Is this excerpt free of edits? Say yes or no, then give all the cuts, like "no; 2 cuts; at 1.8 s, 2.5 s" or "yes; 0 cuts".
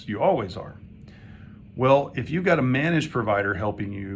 yes; 0 cuts